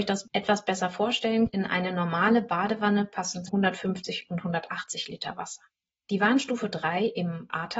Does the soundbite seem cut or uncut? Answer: cut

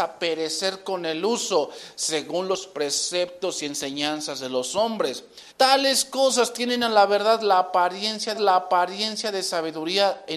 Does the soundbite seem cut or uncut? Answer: cut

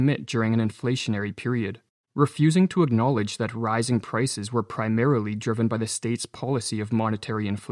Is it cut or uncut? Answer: cut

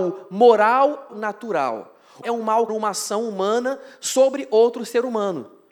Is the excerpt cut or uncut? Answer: cut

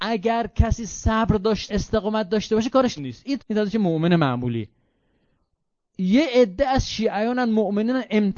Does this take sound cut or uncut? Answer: cut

